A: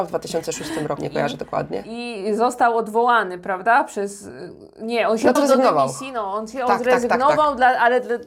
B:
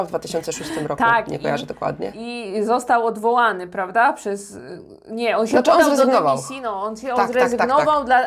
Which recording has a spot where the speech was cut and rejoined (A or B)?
A